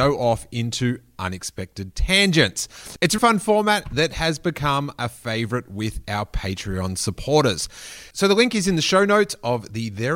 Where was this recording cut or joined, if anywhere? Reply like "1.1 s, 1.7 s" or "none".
3.2 s